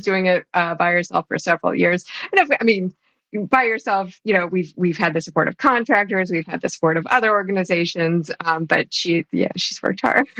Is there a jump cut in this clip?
no; 0 cuts

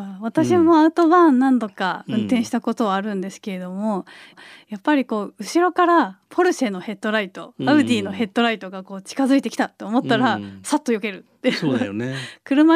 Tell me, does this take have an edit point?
yes; 1 cut; at 4.3 s

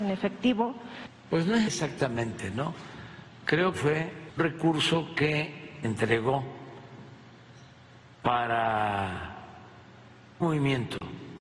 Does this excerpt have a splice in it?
yes; 5 cuts; at 1.7 s, 3.7 s, 4.4 s, 5.8 s, 10.4 s

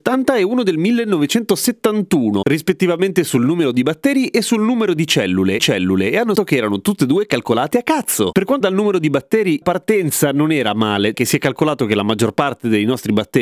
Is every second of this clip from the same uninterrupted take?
no; 6 cuts; at 5.6 s, 6.4 s, 7.7 s, 8.6 s, 9.6 s, 11.1 s

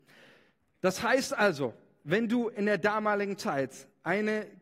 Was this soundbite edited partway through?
no; 0 cuts

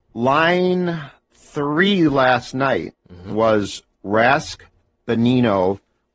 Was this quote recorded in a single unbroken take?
no; 1 cut; at 3.0 s

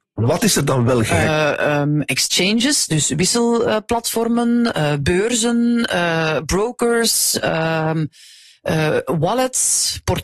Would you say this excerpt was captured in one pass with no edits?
yes; 0 cuts

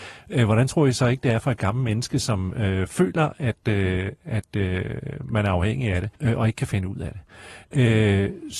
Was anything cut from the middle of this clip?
yes; 1 cut; at 6.1 s

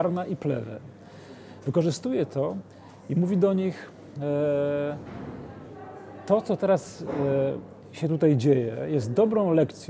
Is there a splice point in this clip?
no; 0 cuts

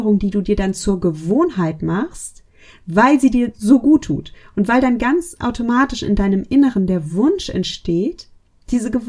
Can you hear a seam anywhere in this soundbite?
no; 0 cuts

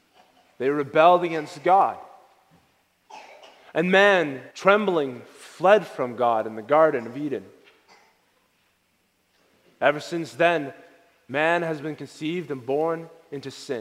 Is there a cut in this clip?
yes; 1 cut; at 4.5 s

